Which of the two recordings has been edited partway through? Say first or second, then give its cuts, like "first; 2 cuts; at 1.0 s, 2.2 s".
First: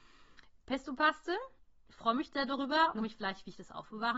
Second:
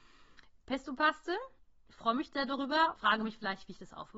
first; 1 cut; at 3.0 s